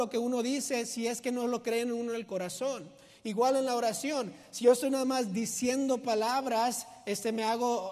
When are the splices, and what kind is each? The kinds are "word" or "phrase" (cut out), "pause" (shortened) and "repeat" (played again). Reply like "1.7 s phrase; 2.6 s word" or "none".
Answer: none

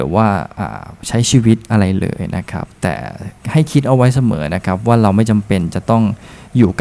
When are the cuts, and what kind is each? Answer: 3.4 s pause

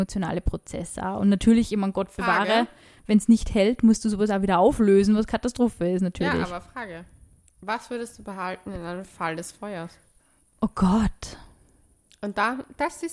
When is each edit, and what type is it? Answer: none

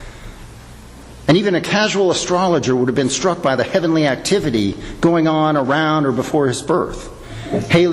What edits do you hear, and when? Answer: none

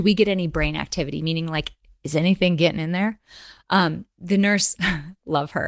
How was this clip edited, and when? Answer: none

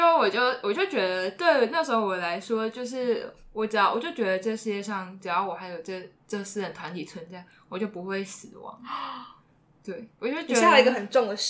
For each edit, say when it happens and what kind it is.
10.1 s pause

